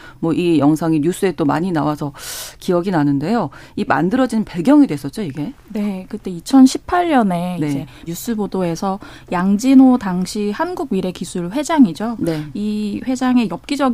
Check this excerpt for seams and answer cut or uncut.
cut